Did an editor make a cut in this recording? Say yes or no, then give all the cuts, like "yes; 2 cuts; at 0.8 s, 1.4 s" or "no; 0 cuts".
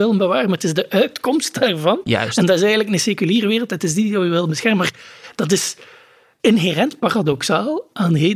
no; 0 cuts